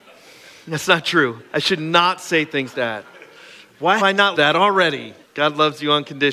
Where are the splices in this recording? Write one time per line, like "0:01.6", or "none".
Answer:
0:01.5
0:02.7
0:04.0
0:04.3
0:05.2

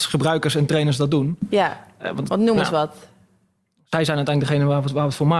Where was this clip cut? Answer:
none

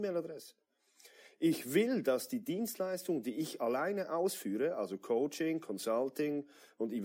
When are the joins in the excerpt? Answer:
none

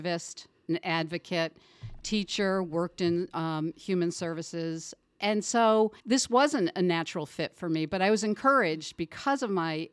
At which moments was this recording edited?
0:06.0

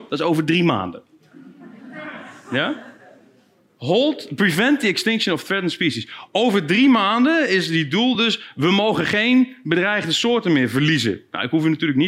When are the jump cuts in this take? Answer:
none

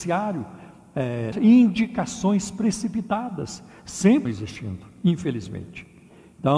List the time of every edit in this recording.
0:01.3
0:04.3

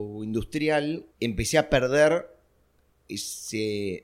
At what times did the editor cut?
0:01.1

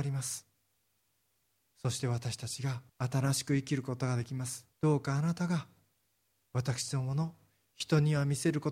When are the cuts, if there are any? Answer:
0:02.9
0:04.7

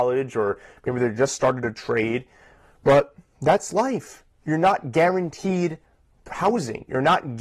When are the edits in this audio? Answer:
none

